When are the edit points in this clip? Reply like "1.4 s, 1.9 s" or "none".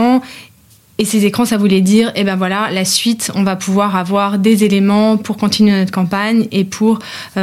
none